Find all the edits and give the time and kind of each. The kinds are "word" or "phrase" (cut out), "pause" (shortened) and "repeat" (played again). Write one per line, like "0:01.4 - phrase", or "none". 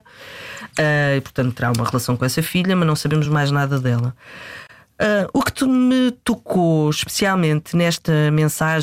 none

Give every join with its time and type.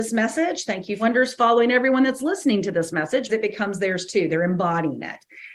0:01.0 - phrase
0:03.3 - word

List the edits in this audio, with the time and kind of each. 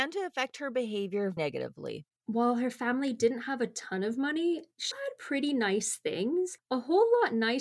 0:01.4 - word
0:02.1 - pause
0:04.9 - word

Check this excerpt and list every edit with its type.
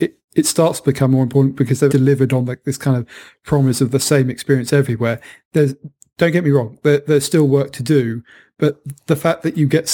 0:01.9 - word

